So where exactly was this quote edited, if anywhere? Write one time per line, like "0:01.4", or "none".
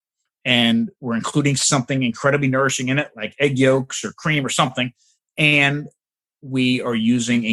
none